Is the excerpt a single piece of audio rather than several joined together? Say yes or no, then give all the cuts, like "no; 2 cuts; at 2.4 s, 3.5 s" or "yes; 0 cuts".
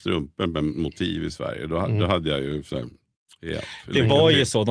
yes; 0 cuts